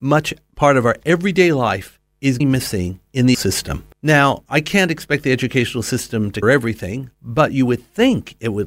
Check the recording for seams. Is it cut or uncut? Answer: cut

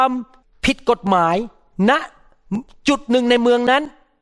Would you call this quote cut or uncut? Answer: uncut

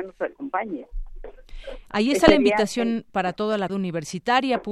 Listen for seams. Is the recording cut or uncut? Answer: cut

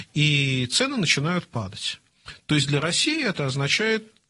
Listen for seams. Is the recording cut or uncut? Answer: uncut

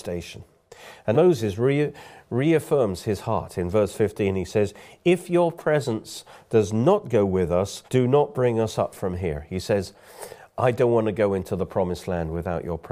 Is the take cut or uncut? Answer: cut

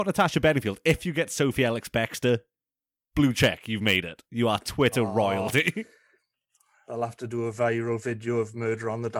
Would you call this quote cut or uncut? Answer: uncut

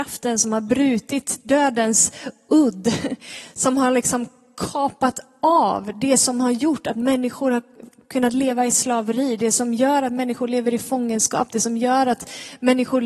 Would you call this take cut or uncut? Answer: uncut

